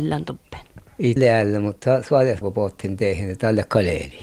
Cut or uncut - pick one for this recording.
cut